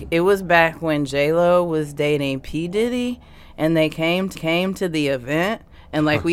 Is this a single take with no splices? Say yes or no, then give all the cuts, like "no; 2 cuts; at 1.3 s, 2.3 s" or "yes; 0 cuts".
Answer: no; 1 cut; at 4.3 s